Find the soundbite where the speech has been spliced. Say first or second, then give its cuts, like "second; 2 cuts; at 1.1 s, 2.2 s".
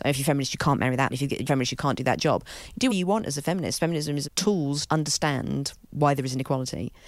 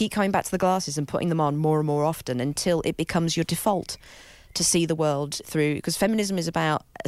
first; 6 cuts; at 1.1 s, 1.5 s, 2.9 s, 3.8 s, 4.2 s, 4.9 s